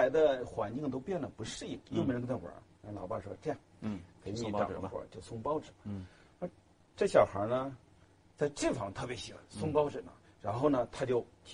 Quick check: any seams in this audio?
no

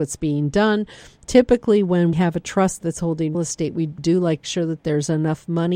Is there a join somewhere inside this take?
yes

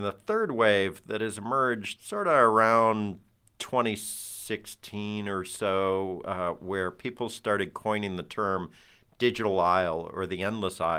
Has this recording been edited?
no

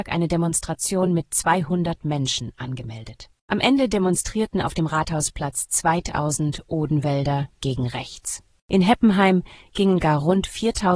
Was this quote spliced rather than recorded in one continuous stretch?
no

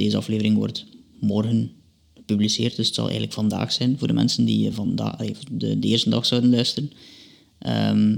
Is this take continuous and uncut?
yes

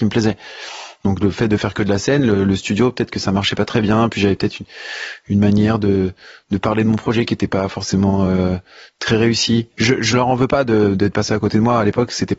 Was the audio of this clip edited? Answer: no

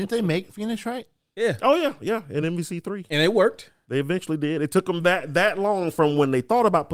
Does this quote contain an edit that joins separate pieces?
no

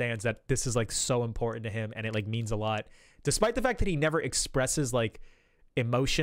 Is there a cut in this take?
no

